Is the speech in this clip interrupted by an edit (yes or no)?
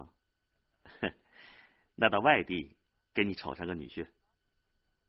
no